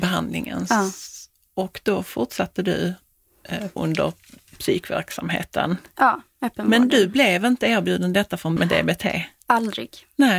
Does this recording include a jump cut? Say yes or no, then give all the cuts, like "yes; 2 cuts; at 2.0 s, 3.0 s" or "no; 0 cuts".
yes; 2 cuts; at 3.8 s, 8.6 s